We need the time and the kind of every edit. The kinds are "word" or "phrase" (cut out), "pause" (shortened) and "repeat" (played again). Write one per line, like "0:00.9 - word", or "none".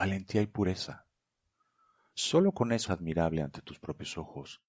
0:02.9 - word